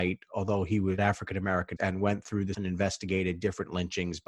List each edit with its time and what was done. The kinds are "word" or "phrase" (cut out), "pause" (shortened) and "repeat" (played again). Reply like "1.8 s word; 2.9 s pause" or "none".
1.0 s word; 1.8 s word; 2.5 s word